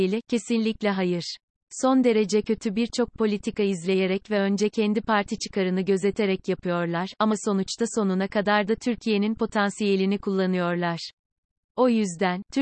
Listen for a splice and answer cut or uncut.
uncut